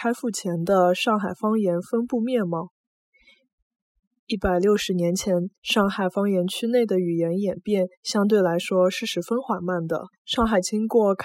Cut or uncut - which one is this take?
cut